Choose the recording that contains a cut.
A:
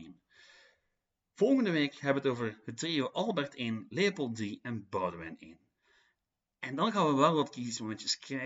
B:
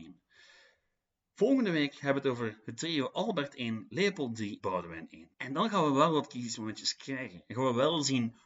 B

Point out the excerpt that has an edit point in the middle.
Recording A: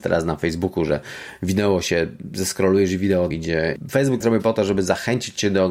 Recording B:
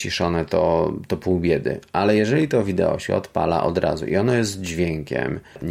A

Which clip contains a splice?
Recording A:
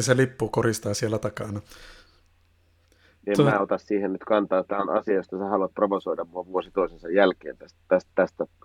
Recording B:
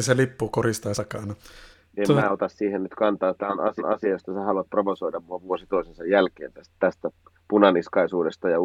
B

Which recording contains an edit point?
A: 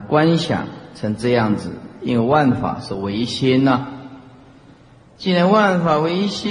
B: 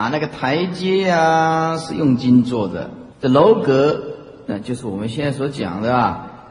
B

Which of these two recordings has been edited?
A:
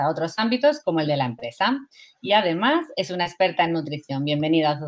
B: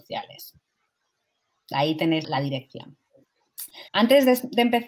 B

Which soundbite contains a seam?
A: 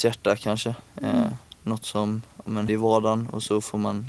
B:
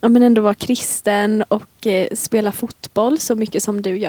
A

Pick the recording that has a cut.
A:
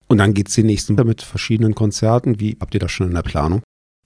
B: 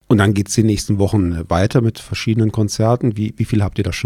A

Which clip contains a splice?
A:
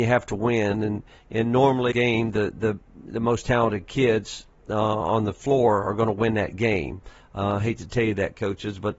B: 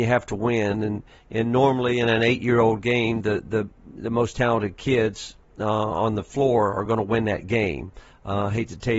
A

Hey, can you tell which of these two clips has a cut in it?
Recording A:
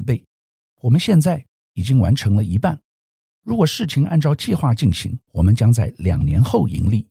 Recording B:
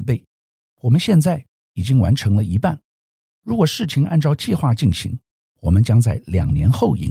A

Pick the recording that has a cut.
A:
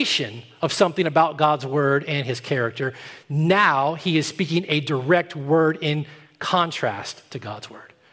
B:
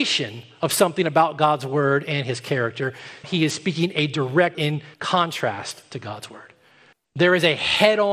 B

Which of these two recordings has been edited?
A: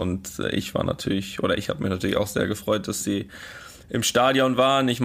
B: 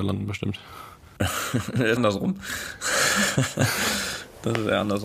B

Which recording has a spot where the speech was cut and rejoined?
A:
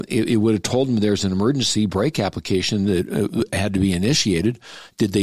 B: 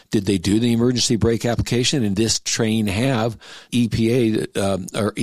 B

